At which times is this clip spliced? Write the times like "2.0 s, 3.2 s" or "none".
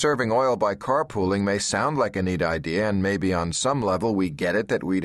none